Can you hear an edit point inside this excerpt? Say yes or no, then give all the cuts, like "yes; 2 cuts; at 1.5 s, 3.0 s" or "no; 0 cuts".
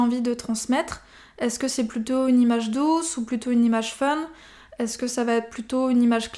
no; 0 cuts